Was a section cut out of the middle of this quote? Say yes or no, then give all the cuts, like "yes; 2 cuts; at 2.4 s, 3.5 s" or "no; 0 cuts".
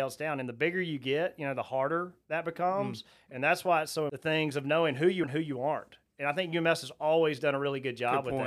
yes; 2 cuts; at 4.1 s, 5.2 s